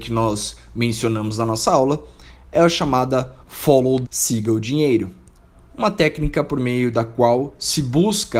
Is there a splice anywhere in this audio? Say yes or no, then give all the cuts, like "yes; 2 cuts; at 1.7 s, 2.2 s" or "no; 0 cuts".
yes; 2 cuts; at 3.4 s, 4.0 s